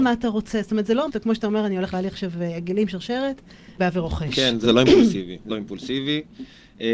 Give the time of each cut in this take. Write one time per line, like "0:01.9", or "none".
0:01.1
0:01.9
0:03.8
0:04.6
0:05.5